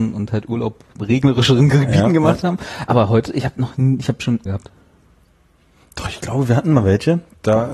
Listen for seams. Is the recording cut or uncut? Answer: cut